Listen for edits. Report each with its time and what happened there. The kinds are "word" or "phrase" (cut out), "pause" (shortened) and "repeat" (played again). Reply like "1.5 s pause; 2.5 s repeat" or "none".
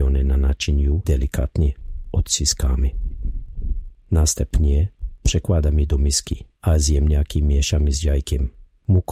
1.0 s word; 6.5 s pause

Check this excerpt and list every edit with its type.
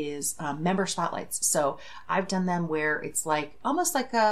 none

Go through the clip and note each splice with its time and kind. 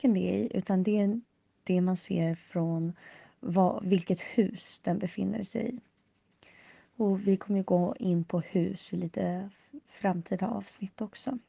none

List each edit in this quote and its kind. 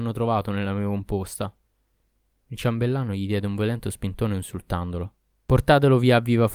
none

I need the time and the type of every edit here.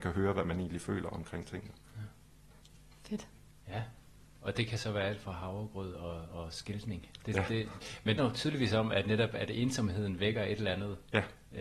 8.2 s phrase

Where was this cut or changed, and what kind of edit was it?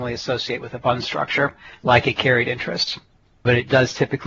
none

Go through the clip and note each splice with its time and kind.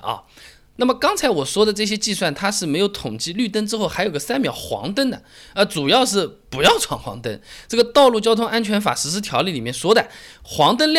none

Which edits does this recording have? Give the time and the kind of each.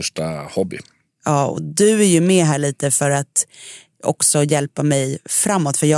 none

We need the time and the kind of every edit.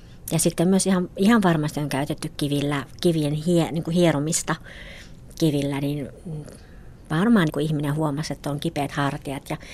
7.5 s phrase

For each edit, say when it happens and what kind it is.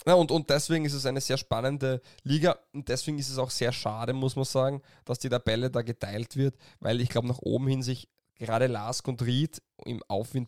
none

